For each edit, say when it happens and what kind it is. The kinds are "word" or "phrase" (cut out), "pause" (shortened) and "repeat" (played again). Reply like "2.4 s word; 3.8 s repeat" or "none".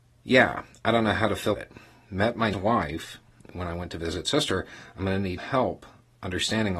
1.5 s word; 2.5 s word; 5.4 s word